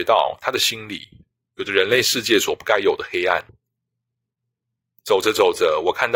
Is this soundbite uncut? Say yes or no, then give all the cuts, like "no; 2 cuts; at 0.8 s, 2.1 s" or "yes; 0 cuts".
yes; 0 cuts